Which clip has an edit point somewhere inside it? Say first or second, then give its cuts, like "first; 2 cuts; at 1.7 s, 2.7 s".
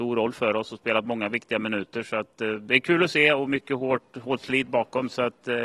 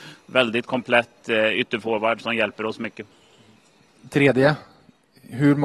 second; 1 cut; at 2.2 s